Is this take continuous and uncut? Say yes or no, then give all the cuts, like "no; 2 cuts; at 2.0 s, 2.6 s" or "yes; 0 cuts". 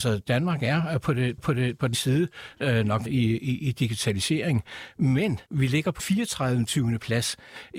no; 5 cuts; at 1.4 s, 1.9 s, 3.0 s, 5.4 s, 6.0 s